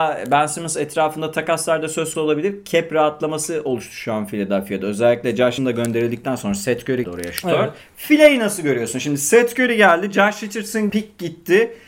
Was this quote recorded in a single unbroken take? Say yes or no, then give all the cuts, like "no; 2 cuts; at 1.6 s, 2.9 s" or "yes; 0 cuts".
no; 5 cuts; at 2.1 s, 5.6 s, 7.0 s, 7.8 s, 10.9 s